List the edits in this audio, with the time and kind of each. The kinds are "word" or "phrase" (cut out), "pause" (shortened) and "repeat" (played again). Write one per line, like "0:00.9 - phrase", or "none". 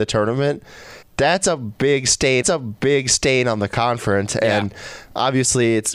0:01.0 - word
0:02.4 - repeat